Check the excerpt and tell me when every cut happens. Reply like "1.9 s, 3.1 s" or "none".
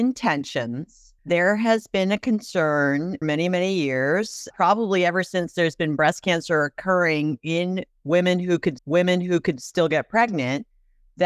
1.2 s, 3.2 s, 4.5 s, 8.8 s